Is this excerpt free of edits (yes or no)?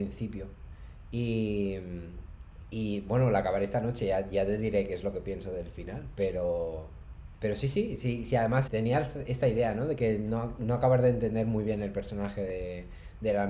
no